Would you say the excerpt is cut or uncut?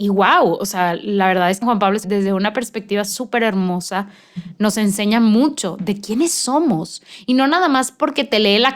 cut